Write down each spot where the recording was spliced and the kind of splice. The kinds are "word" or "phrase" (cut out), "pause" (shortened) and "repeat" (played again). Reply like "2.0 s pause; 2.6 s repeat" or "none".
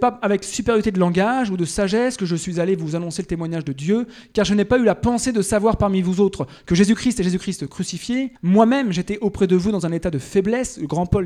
8.4 s pause